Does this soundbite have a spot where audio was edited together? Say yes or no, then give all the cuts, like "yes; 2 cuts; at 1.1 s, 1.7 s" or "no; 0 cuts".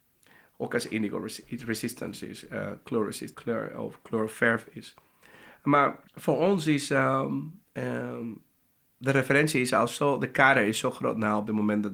yes; 3 cuts; at 3.3 s, 6.1 s, 7.6 s